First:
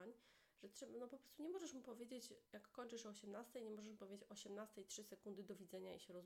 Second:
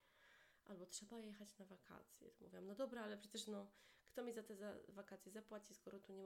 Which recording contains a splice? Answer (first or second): first